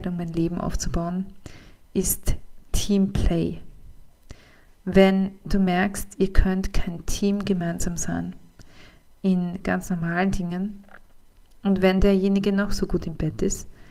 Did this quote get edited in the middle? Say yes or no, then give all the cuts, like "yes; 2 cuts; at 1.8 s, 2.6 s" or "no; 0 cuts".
no; 0 cuts